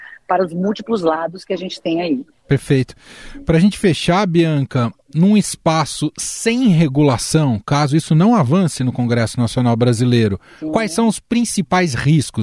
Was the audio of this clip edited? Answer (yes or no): no